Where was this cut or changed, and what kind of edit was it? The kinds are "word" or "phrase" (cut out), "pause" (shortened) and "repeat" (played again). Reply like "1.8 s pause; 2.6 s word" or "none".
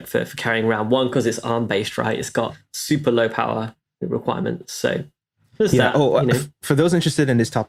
none